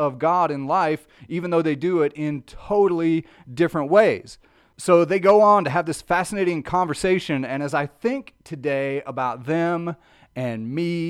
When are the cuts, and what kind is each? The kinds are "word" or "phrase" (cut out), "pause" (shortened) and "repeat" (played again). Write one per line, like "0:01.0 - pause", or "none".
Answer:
none